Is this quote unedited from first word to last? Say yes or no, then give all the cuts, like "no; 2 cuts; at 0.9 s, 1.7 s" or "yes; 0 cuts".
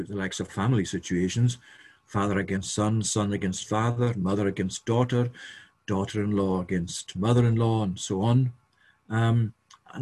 yes; 0 cuts